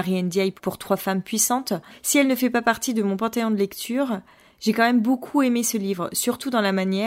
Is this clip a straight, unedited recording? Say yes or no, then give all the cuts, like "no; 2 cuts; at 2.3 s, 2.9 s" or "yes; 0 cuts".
yes; 0 cuts